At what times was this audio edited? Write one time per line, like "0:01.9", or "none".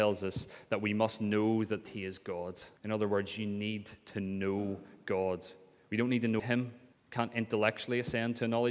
0:01.9
0:02.8
0:06.4
0:06.9